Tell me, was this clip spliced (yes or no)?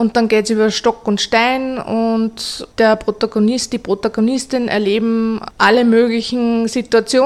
no